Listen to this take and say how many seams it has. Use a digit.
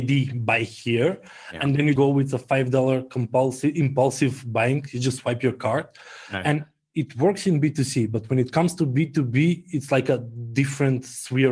1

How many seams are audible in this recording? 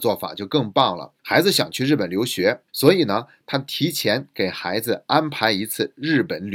2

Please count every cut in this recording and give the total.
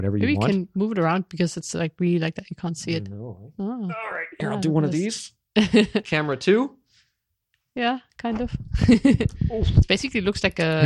0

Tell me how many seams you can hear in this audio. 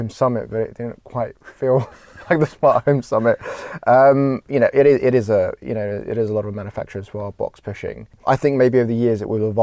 0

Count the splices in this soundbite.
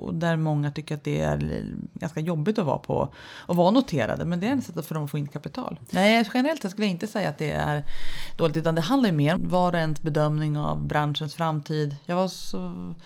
1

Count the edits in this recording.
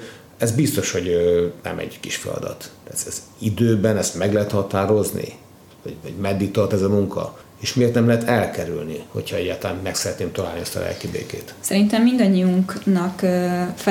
1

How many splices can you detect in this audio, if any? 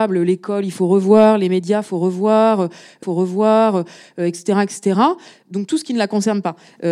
1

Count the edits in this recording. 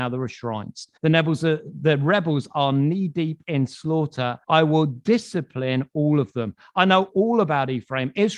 2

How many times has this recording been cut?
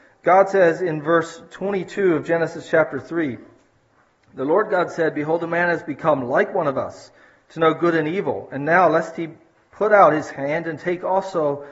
0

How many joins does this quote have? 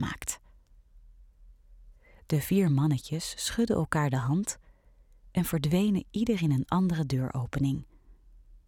0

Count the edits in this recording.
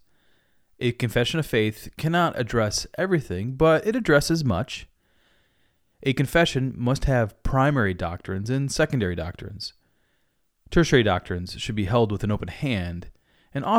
0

